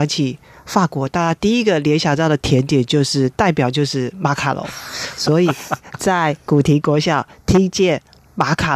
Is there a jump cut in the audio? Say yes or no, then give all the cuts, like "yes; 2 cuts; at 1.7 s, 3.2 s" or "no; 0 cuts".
no; 0 cuts